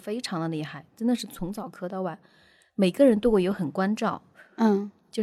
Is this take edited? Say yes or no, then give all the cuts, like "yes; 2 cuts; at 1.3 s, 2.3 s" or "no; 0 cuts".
no; 0 cuts